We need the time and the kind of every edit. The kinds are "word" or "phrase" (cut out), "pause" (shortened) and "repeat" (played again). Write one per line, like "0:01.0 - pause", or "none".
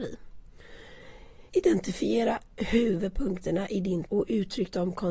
0:01.5 - pause
0:04.1 - word